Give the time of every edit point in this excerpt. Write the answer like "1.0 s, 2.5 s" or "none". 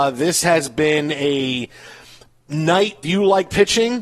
3.0 s